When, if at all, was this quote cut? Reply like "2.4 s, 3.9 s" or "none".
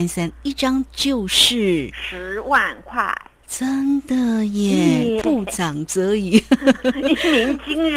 5.2 s